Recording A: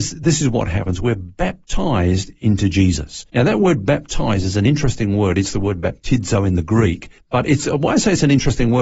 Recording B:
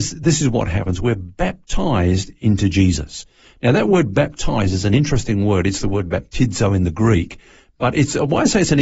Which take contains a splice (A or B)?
A